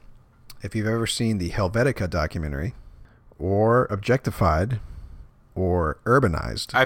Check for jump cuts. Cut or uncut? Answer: uncut